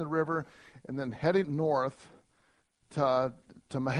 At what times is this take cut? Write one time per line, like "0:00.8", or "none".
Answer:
0:01.4